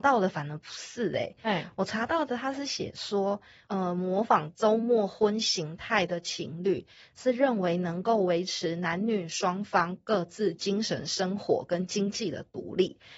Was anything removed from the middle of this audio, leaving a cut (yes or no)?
no